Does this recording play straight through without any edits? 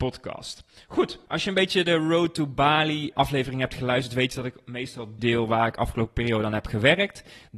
no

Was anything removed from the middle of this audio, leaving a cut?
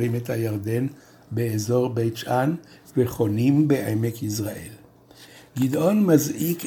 no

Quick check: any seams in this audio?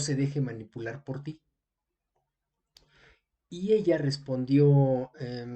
no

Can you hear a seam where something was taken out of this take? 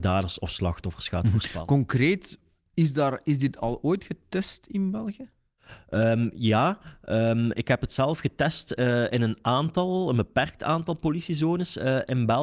no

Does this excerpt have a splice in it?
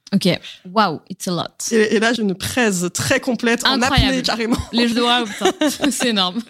yes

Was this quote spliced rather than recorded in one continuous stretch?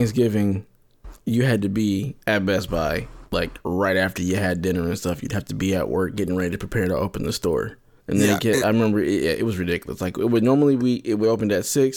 yes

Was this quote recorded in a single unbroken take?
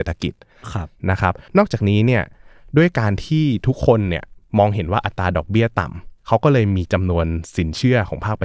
no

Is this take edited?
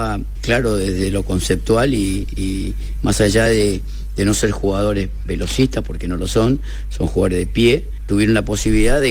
no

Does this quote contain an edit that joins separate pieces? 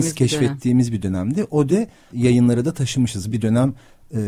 yes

